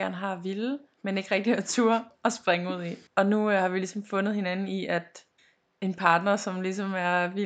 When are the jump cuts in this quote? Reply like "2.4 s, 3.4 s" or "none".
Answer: 3.1 s, 5.4 s